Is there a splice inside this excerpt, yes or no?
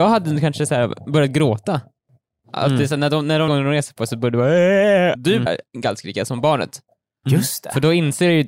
yes